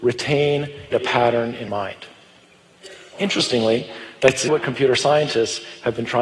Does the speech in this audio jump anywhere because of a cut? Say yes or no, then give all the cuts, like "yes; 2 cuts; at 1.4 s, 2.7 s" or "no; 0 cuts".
yes; 3 cuts; at 0.9 s, 1.7 s, 4.5 s